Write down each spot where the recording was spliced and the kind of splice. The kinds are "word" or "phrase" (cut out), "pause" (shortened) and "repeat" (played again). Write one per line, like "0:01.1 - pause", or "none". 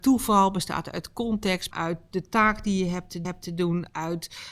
0:01.7 - word
0:03.2 - repeat